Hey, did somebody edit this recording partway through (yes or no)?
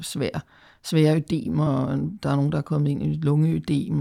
no